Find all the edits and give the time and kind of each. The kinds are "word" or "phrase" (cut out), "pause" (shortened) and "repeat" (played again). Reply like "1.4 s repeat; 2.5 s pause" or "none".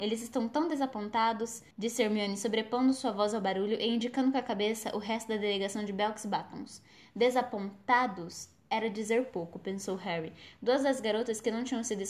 1.7 s pause